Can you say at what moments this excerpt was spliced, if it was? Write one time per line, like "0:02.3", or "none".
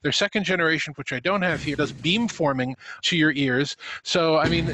0:00.9
0:01.7
0:03.0